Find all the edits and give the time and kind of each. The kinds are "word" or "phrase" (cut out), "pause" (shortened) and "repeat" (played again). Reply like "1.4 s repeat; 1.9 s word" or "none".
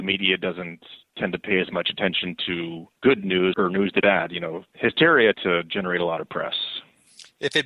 3.0 s pause; 3.5 s word; 4.0 s word; 5.3 s word

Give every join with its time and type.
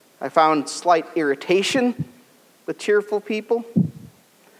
none

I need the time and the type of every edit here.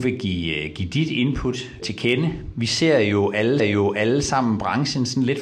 1.8 s word; 3.6 s repeat

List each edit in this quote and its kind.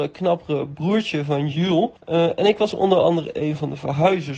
2.0 s pause

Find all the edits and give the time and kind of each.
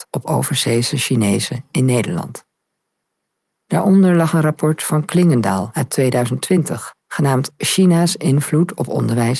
none

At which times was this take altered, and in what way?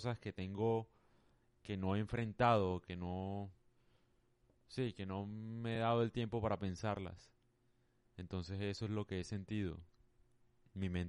none

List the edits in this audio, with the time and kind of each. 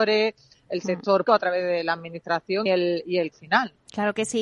1.3 s word; 2.7 s word; 3.3 s word

